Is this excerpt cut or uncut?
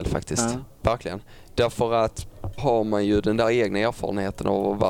cut